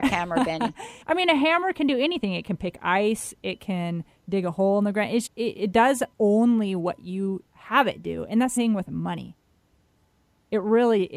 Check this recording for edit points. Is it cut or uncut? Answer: cut